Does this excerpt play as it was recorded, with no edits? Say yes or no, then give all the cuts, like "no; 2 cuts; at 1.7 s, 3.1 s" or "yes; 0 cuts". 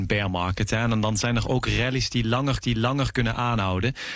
no; 1 cut; at 2.6 s